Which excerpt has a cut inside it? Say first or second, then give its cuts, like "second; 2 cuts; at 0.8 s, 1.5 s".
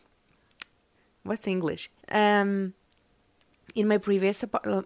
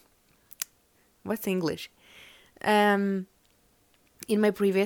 first; 1 cut; at 2.0 s